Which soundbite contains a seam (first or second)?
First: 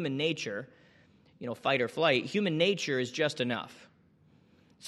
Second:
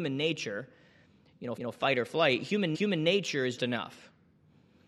second